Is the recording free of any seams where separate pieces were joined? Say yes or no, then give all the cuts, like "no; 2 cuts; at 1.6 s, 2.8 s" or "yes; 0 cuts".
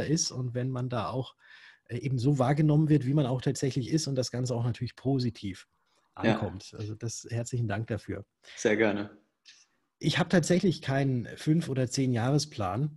yes; 0 cuts